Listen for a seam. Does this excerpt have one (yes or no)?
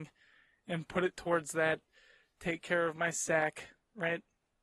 no